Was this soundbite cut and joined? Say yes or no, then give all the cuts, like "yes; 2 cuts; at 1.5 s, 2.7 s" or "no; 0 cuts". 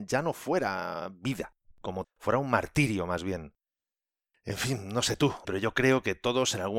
yes; 2 cuts; at 2.0 s, 5.4 s